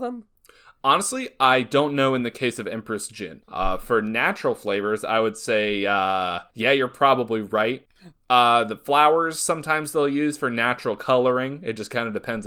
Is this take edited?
no; 0 cuts

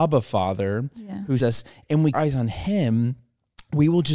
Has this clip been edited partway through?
yes; 2 cuts; at 1.4 s, 2.1 s

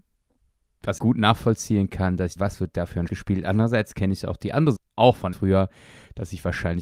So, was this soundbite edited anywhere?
yes; 5 cuts; at 1.0 s, 2.4 s, 3.1 s, 4.8 s, 5.3 s

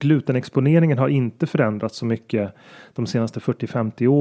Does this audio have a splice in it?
no; 0 cuts

